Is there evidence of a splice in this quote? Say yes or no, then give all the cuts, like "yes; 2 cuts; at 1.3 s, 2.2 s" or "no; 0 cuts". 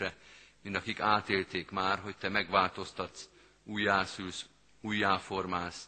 no; 0 cuts